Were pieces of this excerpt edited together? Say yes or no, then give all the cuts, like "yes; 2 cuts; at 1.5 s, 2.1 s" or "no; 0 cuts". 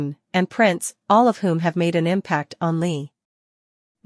no; 0 cuts